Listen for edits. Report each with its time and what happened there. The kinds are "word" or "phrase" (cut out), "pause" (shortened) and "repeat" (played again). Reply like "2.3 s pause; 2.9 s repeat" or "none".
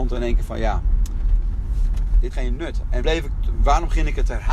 2.3 s word; 3.0 s word